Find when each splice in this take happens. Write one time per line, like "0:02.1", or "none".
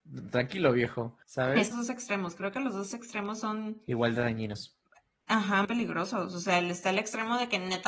0:01.2
0:01.7
0:05.6